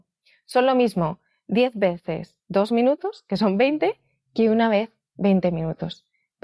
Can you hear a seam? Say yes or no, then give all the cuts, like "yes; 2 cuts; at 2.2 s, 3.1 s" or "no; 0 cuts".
no; 0 cuts